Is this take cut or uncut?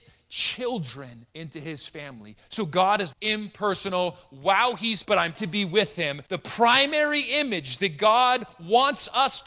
cut